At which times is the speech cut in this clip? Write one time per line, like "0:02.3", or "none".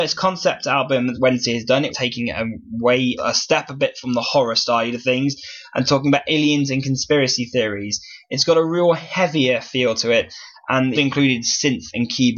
0:01.1
0:01.9
0:03.2
0:10.9